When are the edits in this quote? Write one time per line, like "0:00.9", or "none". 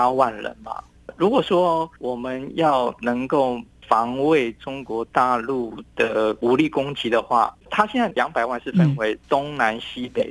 0:02.0
0:07.6
0:09.2